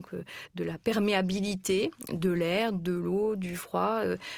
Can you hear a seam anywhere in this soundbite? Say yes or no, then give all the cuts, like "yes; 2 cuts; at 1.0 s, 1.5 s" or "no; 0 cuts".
no; 0 cuts